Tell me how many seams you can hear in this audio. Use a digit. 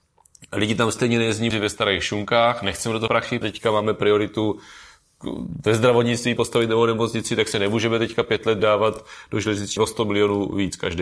7